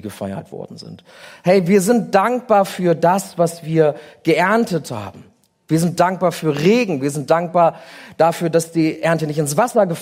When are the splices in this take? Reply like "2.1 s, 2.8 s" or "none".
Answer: none